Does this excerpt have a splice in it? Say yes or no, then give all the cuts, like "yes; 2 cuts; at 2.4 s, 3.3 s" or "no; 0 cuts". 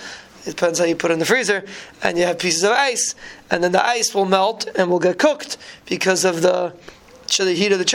no; 0 cuts